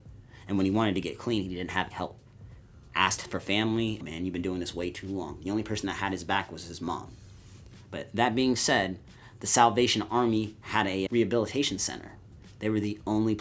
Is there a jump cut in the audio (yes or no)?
yes